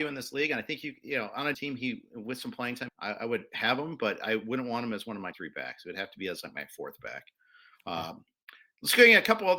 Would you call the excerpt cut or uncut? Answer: cut